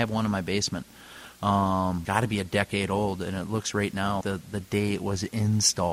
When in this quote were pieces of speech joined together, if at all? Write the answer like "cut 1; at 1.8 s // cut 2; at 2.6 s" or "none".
cut 1; at 2.0 s // cut 2; at 4.2 s